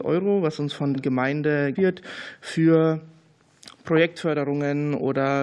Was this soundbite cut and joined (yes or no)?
yes